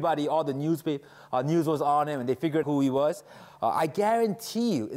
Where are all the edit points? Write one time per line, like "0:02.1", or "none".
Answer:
0:02.6